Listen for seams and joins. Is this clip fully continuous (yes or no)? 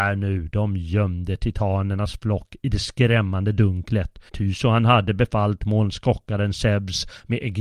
no